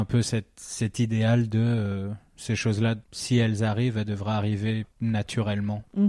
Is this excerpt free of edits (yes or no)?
no